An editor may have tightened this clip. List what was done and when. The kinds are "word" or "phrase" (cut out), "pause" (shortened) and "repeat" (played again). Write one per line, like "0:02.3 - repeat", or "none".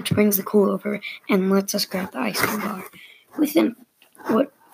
none